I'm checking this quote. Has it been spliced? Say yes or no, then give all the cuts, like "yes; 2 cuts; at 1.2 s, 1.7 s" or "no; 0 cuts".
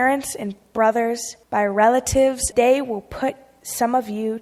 yes; 2 cuts; at 1.4 s, 2.5 s